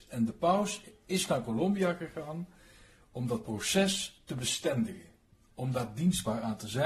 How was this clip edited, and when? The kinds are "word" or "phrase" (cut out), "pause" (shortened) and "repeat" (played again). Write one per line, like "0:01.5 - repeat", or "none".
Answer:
none